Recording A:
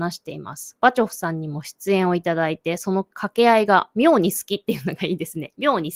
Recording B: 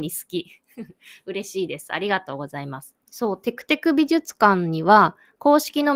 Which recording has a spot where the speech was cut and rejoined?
B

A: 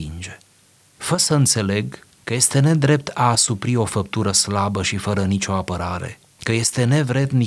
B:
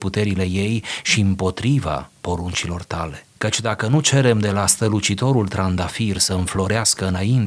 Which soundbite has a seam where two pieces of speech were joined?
B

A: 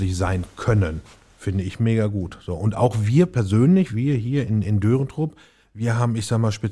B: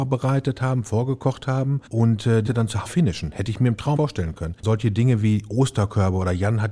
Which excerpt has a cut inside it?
B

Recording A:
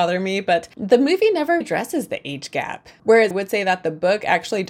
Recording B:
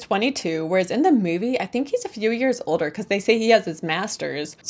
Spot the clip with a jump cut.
A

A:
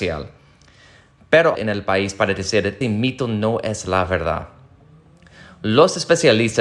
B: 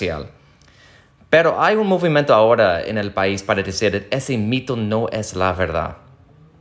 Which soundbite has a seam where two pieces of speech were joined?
A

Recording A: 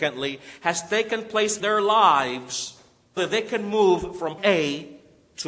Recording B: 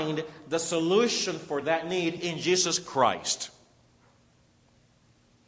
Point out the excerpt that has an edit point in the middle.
A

